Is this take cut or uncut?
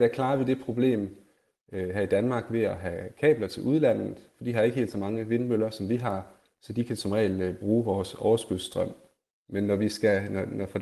uncut